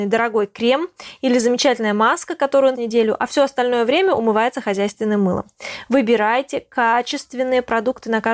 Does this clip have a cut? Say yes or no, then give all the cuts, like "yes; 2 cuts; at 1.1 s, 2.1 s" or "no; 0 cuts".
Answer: yes; 1 cut; at 2.7 s